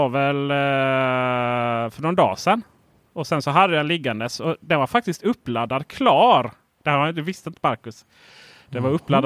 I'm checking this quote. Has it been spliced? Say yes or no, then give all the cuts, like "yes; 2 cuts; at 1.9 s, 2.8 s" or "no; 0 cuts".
no; 0 cuts